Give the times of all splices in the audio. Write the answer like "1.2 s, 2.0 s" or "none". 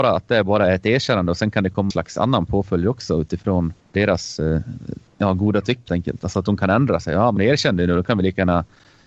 1.9 s, 3.8 s, 5.1 s, 5.9 s, 7.4 s